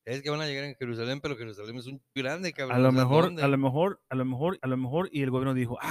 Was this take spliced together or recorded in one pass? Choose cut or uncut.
cut